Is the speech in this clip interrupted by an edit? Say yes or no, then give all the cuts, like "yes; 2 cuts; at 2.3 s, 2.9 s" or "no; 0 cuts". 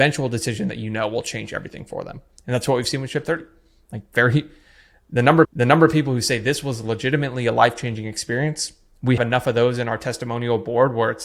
yes; 2 cuts; at 5.4 s, 9.2 s